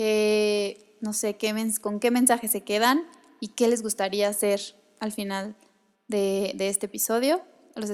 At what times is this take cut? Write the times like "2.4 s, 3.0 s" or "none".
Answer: none